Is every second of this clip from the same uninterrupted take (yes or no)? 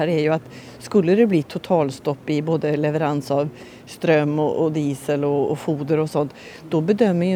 yes